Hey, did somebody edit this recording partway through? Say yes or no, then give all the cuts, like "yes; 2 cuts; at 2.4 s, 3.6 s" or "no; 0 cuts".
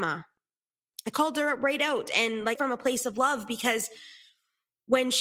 yes; 1 cut; at 2.6 s